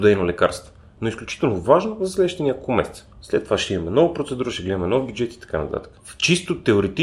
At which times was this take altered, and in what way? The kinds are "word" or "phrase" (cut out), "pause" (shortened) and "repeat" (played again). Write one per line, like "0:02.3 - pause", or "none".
0:03.1 - pause
0:06.0 - pause